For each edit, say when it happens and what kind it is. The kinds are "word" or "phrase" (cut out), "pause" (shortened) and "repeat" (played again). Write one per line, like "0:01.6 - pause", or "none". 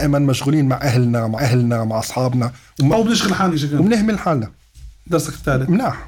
0:01.3 - repeat
0:03.5 - word
0:05.0 - word